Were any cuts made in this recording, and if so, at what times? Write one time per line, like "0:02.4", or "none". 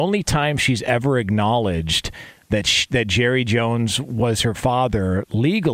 none